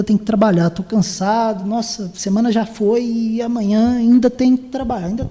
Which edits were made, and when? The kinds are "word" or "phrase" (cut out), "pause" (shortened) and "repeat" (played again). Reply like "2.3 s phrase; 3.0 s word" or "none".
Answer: none